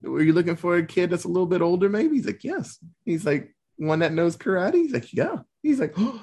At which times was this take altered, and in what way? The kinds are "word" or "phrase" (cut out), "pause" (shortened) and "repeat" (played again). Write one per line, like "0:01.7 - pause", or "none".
0:02.9 - pause